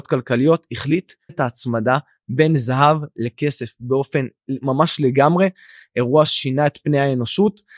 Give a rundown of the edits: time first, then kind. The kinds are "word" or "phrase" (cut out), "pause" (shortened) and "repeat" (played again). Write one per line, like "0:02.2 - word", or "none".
0:01.3 - word
0:04.4 - pause
0:06.3 - word